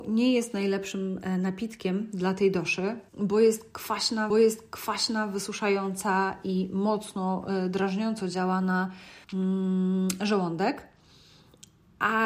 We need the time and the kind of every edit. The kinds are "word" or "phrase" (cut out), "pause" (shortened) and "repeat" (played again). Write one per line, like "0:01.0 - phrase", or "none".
0:03.1 - pause
0:04.3 - repeat
0:09.2 - pause